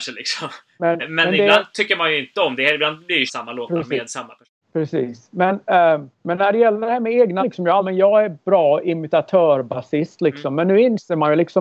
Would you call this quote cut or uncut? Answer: cut